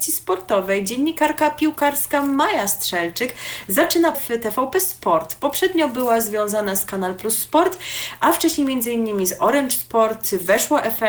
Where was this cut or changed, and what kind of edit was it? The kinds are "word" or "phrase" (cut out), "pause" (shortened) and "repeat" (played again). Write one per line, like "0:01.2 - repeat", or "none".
0:04.1 - word

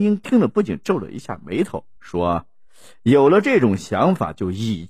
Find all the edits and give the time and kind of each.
0:02.0 - pause

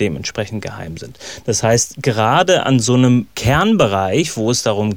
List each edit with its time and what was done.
none

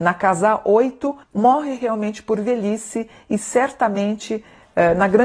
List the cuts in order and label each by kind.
0:01.2 - pause

